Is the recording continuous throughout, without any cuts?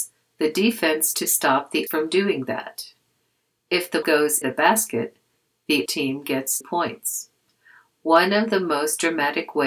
no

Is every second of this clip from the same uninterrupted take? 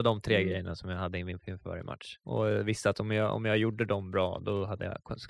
no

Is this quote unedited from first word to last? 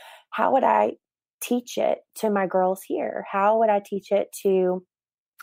yes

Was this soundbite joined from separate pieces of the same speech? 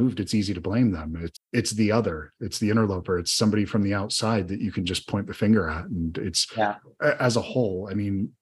yes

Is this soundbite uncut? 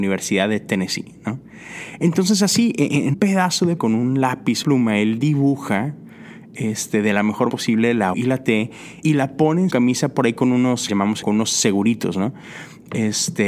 no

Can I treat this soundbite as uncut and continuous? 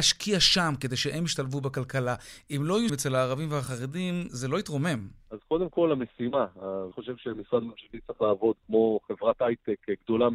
no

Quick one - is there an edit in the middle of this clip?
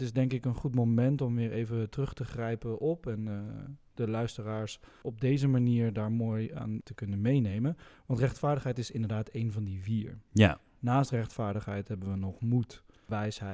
no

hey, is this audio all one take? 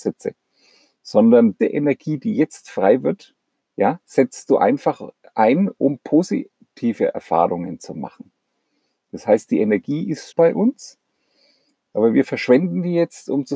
no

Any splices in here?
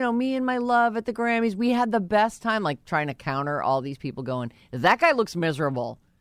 no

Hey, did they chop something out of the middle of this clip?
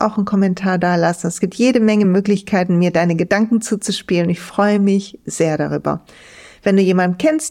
no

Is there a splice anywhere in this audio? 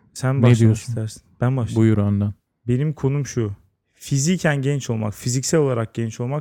no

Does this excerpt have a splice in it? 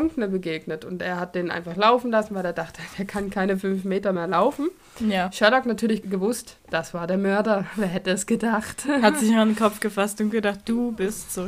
no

